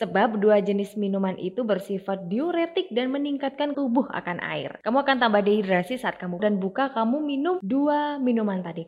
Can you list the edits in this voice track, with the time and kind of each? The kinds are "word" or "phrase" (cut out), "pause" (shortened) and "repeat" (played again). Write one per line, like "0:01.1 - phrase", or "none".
0:03.7 - word
0:06.4 - phrase